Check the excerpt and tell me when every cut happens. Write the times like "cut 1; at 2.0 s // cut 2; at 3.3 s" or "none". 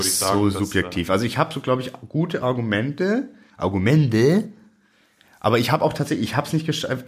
none